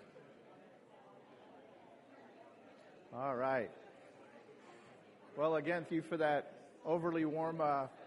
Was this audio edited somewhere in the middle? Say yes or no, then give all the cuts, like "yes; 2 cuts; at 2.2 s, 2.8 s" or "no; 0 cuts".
yes; 1 cut; at 5.9 s